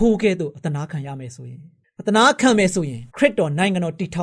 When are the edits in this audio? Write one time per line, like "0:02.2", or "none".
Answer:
0:01.8
0:03.1